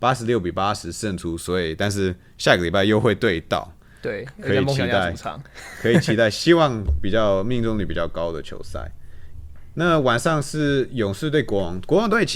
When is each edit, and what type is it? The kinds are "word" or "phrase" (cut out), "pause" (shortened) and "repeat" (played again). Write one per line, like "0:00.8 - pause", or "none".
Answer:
none